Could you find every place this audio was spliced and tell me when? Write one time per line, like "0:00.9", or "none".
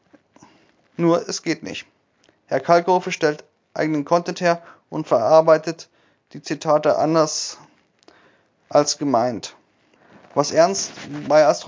none